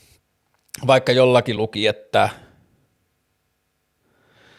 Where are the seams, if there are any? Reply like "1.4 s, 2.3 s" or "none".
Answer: none